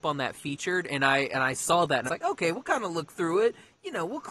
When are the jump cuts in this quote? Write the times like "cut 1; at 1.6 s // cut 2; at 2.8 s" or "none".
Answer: cut 1; at 2.1 s